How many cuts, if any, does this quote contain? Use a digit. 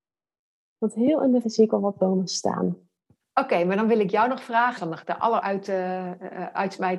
3